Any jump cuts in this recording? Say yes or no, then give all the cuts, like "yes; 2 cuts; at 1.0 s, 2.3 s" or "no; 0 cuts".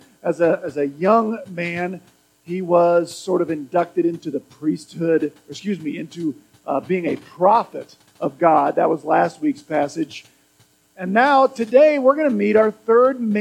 no; 0 cuts